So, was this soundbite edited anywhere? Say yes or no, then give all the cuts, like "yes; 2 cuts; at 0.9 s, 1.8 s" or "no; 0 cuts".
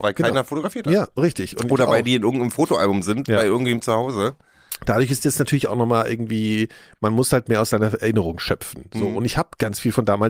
no; 0 cuts